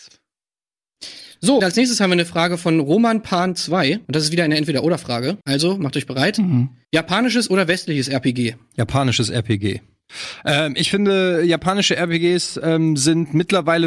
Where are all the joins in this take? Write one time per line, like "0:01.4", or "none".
0:01.6
0:04.0
0:05.4
0:06.8